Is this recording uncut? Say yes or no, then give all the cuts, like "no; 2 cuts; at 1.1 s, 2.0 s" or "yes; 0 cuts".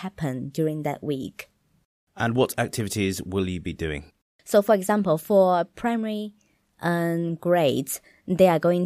yes; 0 cuts